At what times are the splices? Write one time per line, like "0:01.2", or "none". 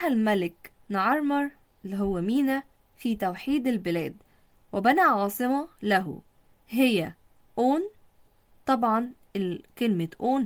none